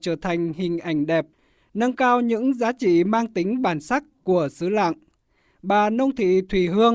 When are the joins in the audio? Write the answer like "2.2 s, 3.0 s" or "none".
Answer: none